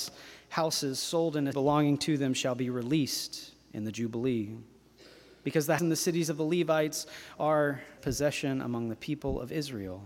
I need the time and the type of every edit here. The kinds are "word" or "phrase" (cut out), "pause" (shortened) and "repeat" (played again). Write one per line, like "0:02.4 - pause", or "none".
0:01.5 - word
0:05.8 - word
0:08.0 - word